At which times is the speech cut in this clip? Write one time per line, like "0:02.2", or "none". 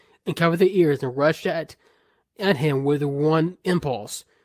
none